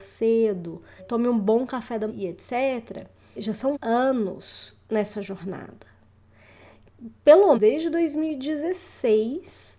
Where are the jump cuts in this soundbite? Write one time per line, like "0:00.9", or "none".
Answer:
0:01.0
0:02.1
0:03.4
0:03.7
0:07.5